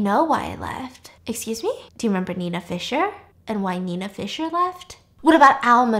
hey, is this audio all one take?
no; 3 cuts; at 1.2 s, 1.9 s, 3.3 s

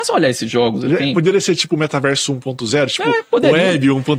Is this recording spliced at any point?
no; 0 cuts

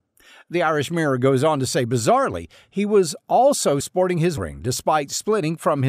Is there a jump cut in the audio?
yes; 2 cuts; at 3.8 s, 4.4 s

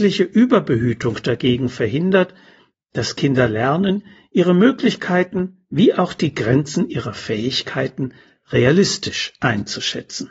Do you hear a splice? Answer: no; 0 cuts

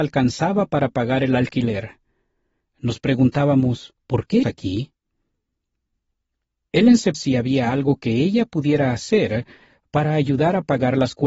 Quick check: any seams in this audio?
yes; 3 cuts; at 4.0 s, 4.4 s, 7.1 s

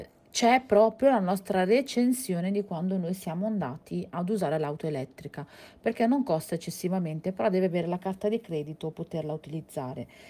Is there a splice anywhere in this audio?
yes; 1 cut; at 8.9 s

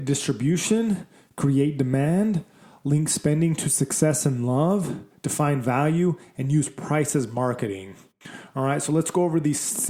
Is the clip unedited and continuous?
yes; 0 cuts

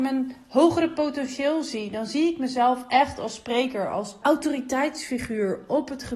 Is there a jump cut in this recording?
yes; 1 cut; at 4.2 s

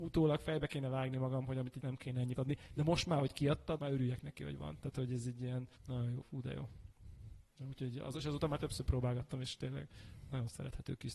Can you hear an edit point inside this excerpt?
yes; 5 cuts; at 1.8 s, 2.4 s, 3.8 s, 5.8 s, 6.2 s

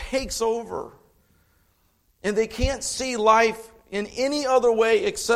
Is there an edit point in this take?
no; 0 cuts

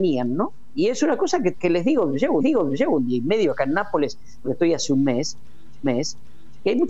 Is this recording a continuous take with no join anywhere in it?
no; 4 cuts; at 1.5 s, 2.4 s, 4.4 s, 5.8 s

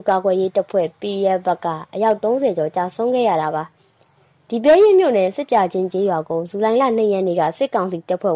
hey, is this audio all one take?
yes; 0 cuts

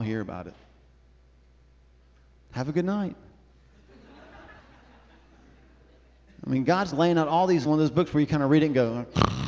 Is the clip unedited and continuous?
no; 3 cuts; at 4.6 s, 6.9 s, 7.6 s

